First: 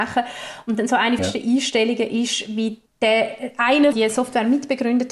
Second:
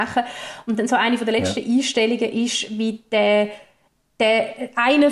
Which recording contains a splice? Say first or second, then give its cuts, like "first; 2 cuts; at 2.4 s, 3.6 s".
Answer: first; 3 cuts; at 1.2 s, 2.9 s, 3.9 s